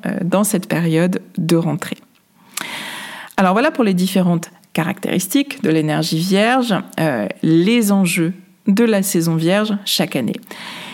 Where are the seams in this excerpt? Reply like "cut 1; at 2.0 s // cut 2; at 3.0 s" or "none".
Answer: none